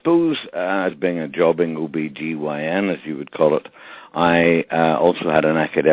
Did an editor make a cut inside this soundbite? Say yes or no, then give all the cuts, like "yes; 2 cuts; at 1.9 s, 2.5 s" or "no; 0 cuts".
yes; 1 cut; at 0.9 s